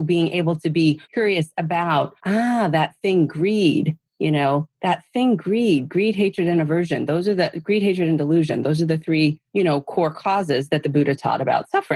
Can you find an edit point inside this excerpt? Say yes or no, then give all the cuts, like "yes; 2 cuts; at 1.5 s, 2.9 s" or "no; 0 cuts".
yes; 4 cuts; at 1.0 s, 2.2 s, 4.1 s, 9.5 s